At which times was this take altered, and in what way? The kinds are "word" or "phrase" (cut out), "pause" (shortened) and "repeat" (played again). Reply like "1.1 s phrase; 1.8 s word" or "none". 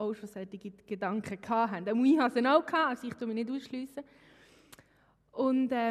none